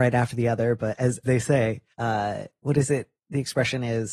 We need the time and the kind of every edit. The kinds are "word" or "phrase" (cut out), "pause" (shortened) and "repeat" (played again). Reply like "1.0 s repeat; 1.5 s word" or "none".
1.2 s word; 1.9 s pause; 3.2 s pause

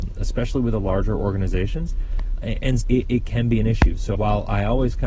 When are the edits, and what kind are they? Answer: 2.8 s word; 4.1 s word

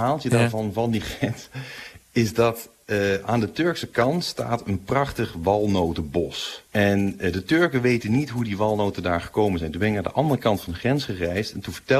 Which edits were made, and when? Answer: 6.7 s pause

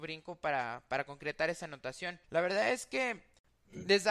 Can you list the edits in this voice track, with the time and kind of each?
2.2 s pause

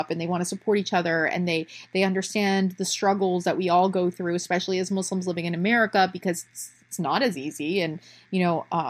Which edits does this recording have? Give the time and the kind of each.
none

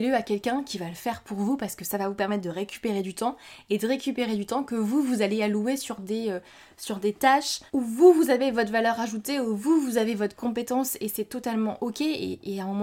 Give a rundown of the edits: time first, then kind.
7.7 s pause

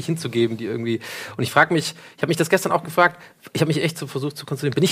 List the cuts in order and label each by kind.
none

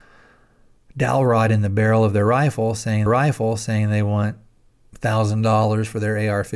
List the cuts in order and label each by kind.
3.1 s repeat; 4.7 s pause

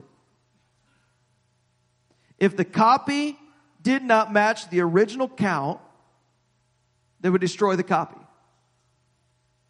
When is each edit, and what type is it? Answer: none

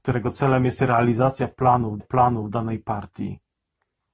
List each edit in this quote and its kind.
2.0 s repeat

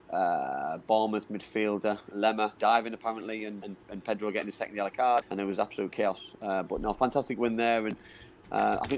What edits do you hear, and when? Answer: 2.1 s word; 2.6 s word; 3.6 s word; 5.2 s word

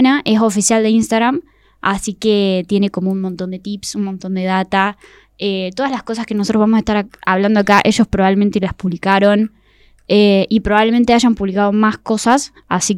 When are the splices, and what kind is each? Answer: none

